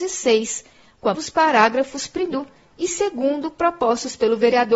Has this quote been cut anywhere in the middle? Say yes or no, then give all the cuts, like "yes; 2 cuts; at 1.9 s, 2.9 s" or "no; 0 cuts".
yes; 2 cuts; at 1.1 s, 2.3 s